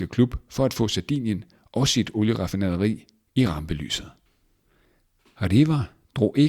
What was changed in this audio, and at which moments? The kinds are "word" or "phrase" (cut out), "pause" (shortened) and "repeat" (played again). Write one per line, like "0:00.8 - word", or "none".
none